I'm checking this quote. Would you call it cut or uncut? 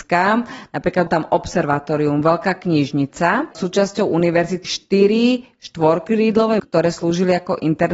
cut